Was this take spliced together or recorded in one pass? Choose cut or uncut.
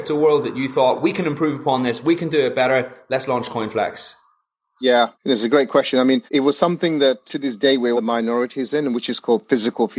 cut